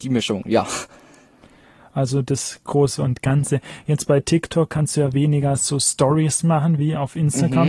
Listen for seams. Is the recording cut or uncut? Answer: uncut